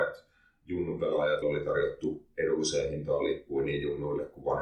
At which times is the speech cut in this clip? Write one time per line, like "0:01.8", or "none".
0:01.4